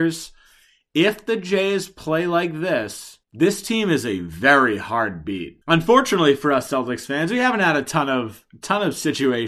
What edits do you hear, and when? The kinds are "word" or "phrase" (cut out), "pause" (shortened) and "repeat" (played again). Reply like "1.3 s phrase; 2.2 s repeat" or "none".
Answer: 3.2 s pause; 5.6 s pause

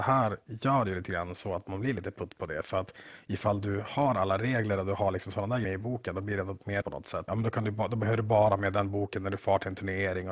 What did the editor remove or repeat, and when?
5.6 s phrase; 6.8 s word; 7.3 s phrase

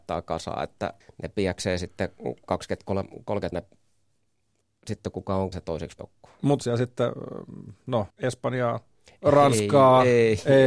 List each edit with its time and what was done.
1.0 s pause; 3.5 s word; 5.5 s word; 6.0 s word; 6.6 s word; 8.1 s pause

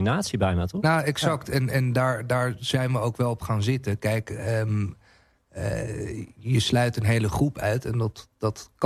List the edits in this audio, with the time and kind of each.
none

